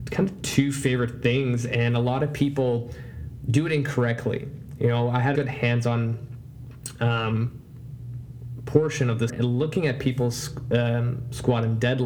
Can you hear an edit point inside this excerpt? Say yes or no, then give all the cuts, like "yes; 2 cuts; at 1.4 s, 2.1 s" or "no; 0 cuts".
yes; 2 cuts; at 5.3 s, 9.3 s